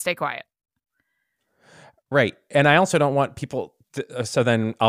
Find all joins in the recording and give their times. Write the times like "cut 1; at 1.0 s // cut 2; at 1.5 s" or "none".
cut 1; at 3.8 s